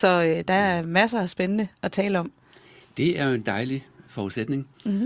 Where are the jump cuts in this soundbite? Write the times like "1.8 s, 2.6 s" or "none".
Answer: none